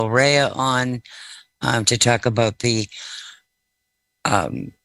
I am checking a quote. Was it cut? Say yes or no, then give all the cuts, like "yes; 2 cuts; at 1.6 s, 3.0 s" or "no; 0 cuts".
no; 0 cuts